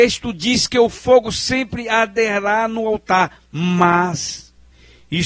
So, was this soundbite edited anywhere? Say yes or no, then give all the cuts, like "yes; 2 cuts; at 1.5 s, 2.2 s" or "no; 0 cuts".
no; 0 cuts